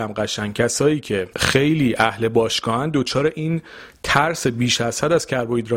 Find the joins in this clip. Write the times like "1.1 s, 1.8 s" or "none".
1.3 s